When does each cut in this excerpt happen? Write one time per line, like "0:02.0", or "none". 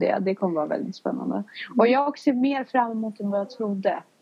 none